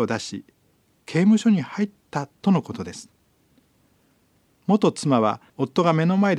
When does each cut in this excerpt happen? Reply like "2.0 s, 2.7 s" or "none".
5.5 s